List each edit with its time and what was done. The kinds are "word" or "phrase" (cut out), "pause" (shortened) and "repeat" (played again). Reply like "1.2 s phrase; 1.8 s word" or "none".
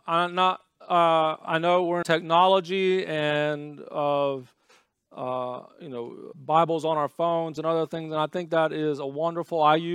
2.0 s phrase; 5.7 s pause; 6.3 s word